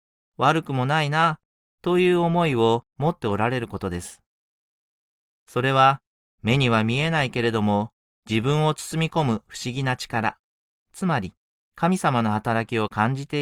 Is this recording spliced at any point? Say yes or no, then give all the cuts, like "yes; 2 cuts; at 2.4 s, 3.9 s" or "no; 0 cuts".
no; 0 cuts